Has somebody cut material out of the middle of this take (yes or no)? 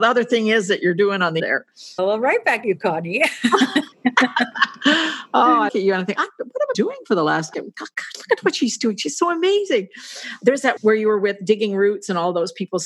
yes